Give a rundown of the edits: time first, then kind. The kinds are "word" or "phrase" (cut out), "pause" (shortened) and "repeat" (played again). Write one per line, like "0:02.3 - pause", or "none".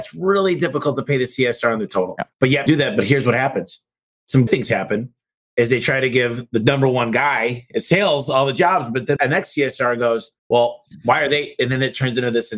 0:01.9 - word
0:02.3 - pause
0:02.7 - word
0:04.5 - word
0:09.2 - word
0:10.4 - pause